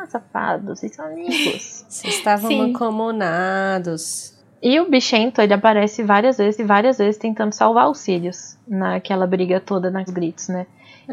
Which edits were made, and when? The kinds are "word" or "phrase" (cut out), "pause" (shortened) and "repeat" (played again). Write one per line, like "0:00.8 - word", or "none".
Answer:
0:06.6 - repeat
0:10.1 - phrase